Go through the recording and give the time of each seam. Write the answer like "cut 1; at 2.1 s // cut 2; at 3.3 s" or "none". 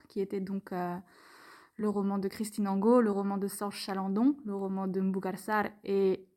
none